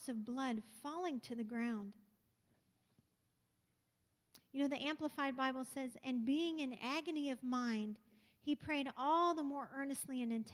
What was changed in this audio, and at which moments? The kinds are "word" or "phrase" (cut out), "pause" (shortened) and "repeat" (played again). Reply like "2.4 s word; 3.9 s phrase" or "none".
none